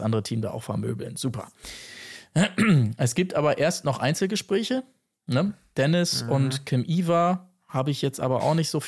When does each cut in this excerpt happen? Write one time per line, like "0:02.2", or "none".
none

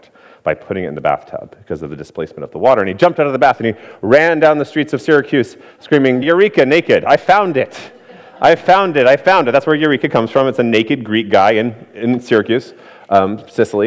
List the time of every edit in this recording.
0:06.2

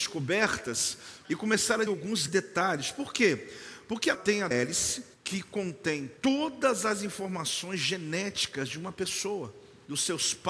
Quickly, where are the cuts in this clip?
0:01.2
0:01.9
0:02.3
0:04.1
0:04.5
0:05.1
0:06.2

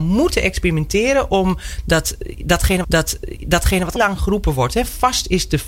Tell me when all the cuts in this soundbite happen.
0:02.8
0:04.0

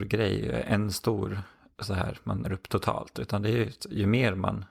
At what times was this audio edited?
0:02.4

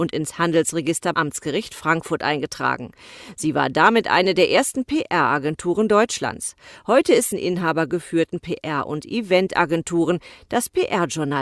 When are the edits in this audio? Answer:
0:01.1
0:07.3

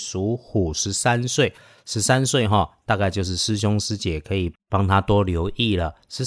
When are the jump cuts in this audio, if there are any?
none

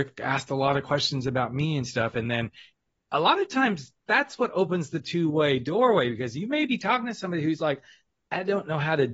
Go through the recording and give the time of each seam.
none

